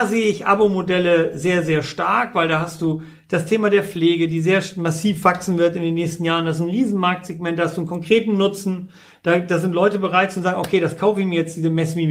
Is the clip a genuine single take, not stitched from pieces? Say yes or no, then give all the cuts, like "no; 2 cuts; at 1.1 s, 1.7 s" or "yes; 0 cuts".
yes; 0 cuts